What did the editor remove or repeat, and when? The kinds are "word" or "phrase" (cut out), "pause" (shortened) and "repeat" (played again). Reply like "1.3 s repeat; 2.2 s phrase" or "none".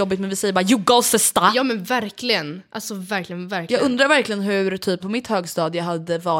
3.1 s word; 5.0 s phrase